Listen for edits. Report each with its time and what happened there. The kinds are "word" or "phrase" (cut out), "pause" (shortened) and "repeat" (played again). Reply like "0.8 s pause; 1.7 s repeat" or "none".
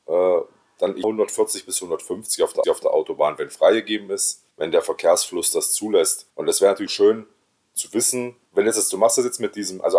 1.0 s word; 2.6 s repeat; 4.5 s pause; 6.3 s pause; 6.9 s word; 8.5 s pause